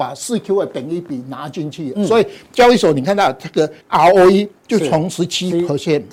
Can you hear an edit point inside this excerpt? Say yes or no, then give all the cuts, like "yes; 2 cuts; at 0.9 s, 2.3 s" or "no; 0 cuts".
yes; 1 cut; at 3.8 s